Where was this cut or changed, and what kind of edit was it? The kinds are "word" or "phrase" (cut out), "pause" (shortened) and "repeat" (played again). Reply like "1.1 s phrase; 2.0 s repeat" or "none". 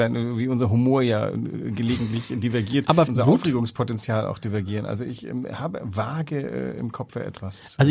3.1 s phrase